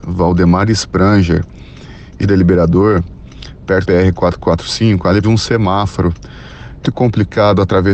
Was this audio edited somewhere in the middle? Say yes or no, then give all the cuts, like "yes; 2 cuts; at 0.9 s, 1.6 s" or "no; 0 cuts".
yes; 4 cuts; at 2.2 s, 3.8 s, 5.2 s, 6.8 s